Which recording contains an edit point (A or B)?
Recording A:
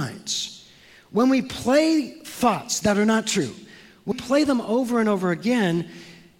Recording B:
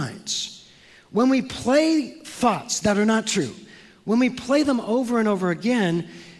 A